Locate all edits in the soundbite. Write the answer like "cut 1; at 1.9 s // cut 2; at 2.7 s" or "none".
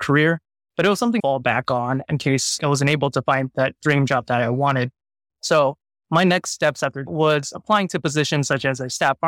cut 1; at 1.2 s // cut 2; at 2.6 s // cut 3; at 7.1 s